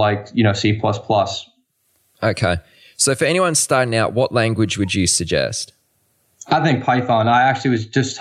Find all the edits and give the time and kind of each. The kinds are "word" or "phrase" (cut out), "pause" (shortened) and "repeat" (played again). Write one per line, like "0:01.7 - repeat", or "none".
none